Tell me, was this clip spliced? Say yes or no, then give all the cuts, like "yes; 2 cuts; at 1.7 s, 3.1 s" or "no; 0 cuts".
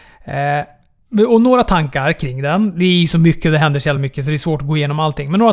no; 0 cuts